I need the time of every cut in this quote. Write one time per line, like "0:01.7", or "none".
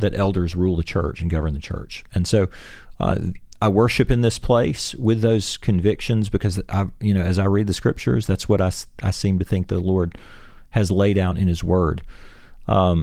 none